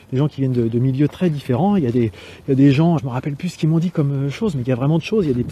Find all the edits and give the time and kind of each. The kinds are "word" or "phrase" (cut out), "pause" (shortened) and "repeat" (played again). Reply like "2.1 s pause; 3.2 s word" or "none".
3.0 s word

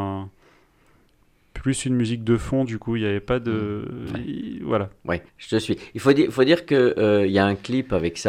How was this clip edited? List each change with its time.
5.3 s pause

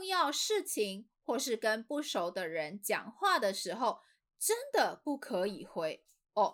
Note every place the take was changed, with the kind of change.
none

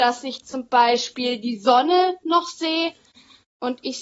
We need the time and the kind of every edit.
none

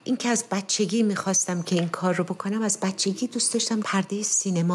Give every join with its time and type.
3.8 s word

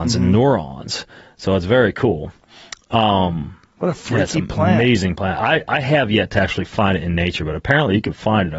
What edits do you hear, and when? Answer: none

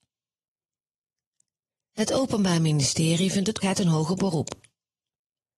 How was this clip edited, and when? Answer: 3.6 s phrase

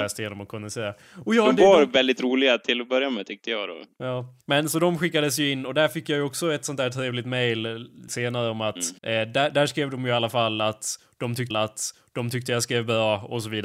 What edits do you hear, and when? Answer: 4.4 s pause; 8.1 s word; 9.0 s pause; 11.5 s repeat

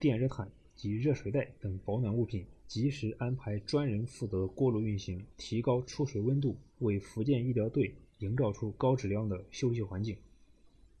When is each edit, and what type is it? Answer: 2.6 s pause; 5.3 s pause; 6.7 s pause

